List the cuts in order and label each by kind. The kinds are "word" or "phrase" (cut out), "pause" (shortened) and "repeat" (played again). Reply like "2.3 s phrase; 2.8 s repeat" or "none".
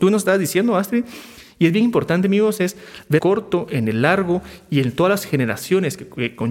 3.2 s phrase